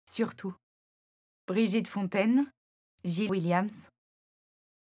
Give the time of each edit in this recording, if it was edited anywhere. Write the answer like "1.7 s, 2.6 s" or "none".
3.3 s

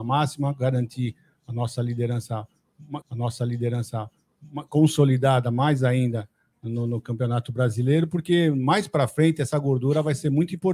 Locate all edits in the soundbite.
3.0 s

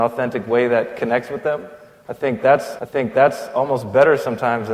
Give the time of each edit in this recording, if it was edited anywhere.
2.8 s

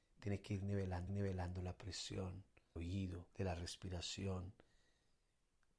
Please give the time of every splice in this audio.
1.1 s, 2.8 s, 3.3 s

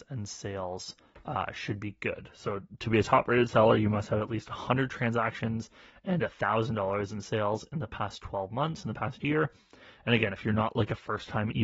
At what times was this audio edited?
none

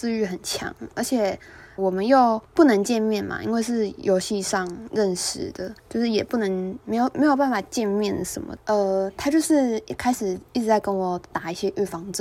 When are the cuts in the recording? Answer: 1.8 s, 2.4 s, 5.8 s, 8.6 s

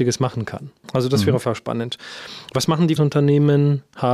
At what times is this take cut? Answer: 1.4 s, 3.0 s

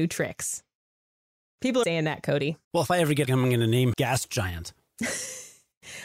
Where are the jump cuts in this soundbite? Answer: 1.8 s, 2.6 s, 3.2 s, 3.9 s

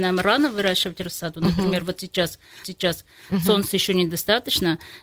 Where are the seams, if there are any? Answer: 2.6 s

